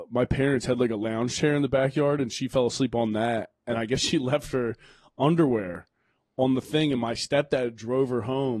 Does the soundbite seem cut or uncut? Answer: uncut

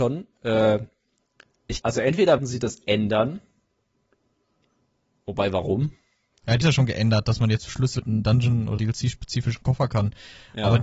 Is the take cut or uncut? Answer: cut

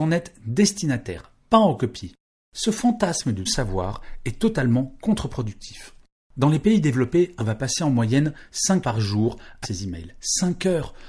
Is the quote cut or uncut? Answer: cut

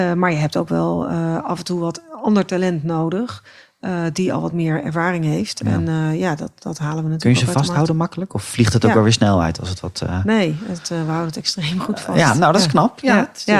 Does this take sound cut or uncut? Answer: uncut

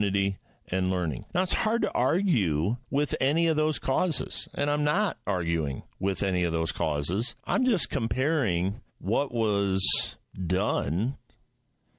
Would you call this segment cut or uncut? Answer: cut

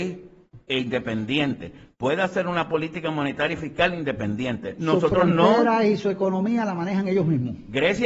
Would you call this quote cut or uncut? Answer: uncut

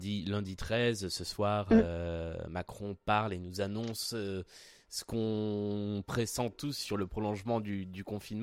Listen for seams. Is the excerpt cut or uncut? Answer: uncut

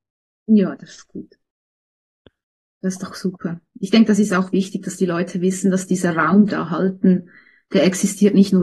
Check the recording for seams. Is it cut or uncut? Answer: cut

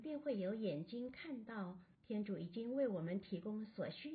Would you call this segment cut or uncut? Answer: cut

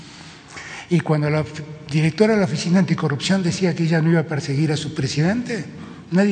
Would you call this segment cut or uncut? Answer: uncut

